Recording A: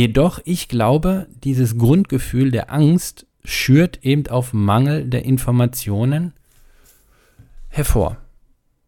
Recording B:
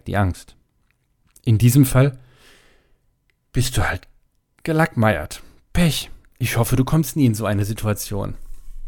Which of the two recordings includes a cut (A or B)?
A